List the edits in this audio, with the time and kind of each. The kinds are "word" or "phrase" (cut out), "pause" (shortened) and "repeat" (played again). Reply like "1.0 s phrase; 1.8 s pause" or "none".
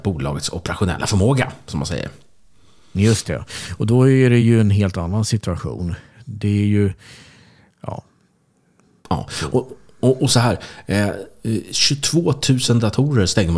none